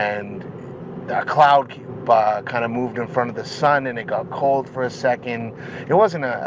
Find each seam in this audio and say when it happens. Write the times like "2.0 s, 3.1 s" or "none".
none